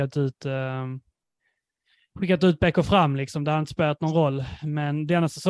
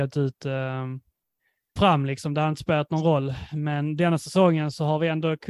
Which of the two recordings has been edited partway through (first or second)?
second